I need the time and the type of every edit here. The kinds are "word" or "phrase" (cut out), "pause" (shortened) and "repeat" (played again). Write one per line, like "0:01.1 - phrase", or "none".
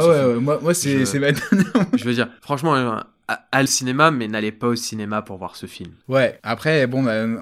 0:03.7 - word